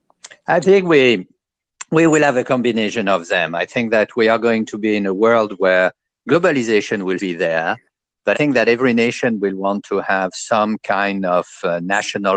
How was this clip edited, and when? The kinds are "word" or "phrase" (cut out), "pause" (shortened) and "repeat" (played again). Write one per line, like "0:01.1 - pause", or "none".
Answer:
0:07.2 - word
0:08.3 - word